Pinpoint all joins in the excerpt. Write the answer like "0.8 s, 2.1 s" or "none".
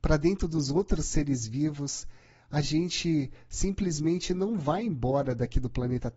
none